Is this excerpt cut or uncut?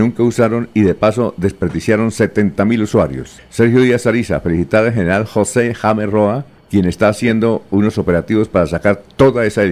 uncut